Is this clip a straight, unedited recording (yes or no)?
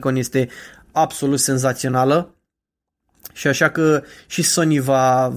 yes